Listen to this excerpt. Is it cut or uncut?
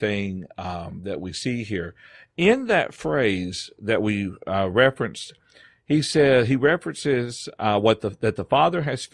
uncut